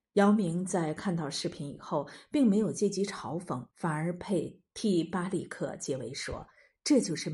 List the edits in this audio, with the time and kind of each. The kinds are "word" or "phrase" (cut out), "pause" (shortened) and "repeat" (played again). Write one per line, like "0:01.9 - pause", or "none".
0:03.7 - pause
0:04.7 - pause